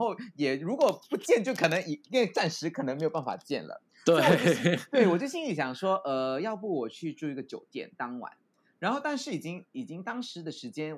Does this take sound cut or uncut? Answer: uncut